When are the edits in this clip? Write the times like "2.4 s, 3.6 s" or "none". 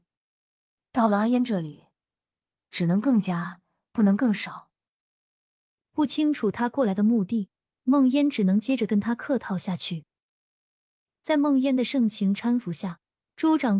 none